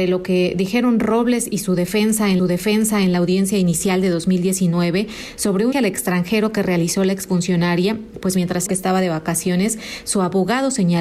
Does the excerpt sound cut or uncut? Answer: cut